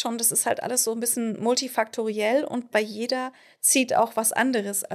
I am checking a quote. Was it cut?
no; 0 cuts

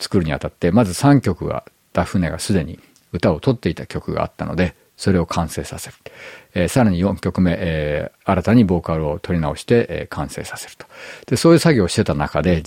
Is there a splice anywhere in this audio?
no; 0 cuts

